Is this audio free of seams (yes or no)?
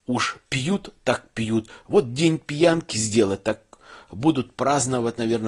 yes